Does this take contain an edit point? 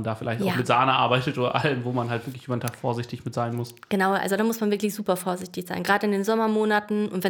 no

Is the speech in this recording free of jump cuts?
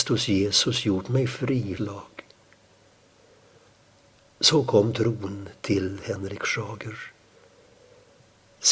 no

